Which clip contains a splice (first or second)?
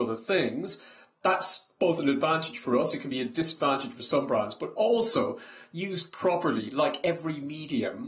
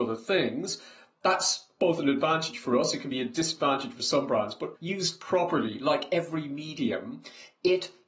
second